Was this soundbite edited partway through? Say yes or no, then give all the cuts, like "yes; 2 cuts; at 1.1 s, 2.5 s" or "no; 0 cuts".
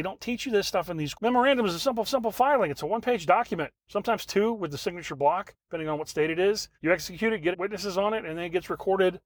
yes; 6 cuts; at 1.1 s, 2.0 s, 3.8 s, 5.6 s, 6.8 s, 7.5 s